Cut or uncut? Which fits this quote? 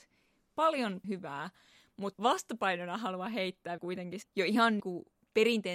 cut